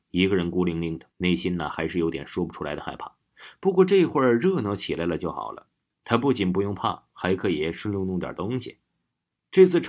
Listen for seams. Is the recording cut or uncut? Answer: cut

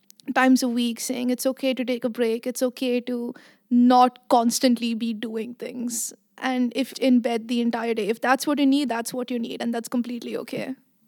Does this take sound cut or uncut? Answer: cut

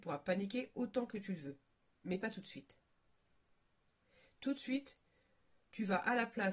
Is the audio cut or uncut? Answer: uncut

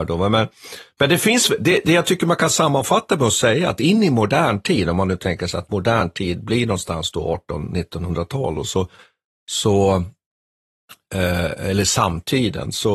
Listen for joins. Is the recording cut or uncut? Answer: uncut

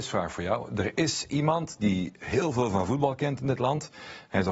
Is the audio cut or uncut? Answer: uncut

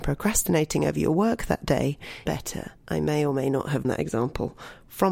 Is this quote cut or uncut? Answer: cut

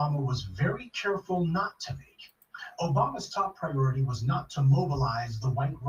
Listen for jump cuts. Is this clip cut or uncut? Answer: uncut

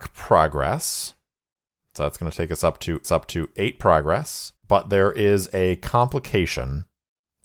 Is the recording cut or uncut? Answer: cut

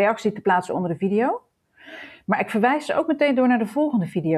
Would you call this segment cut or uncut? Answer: uncut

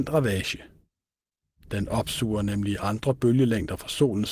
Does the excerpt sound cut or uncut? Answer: uncut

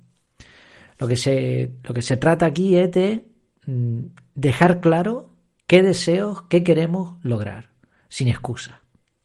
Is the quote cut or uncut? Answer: uncut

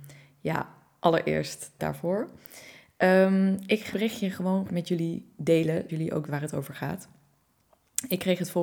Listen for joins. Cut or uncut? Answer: cut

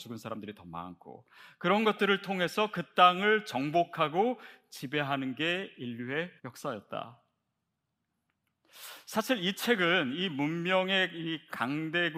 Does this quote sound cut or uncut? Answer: cut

